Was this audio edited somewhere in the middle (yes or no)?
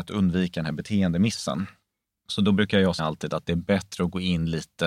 yes